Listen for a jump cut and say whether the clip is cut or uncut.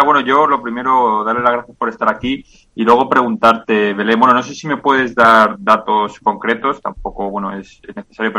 uncut